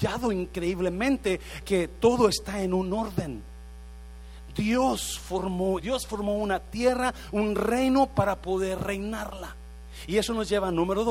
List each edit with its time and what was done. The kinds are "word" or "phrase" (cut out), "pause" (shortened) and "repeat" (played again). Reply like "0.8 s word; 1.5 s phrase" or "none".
1.6 s word; 5.8 s word